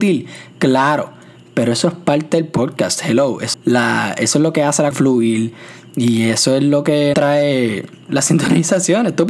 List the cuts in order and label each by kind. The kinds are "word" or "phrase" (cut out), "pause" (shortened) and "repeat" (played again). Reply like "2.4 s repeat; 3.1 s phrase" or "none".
3.5 s phrase; 4.9 s word; 7.1 s word